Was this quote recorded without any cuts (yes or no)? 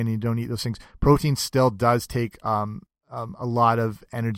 no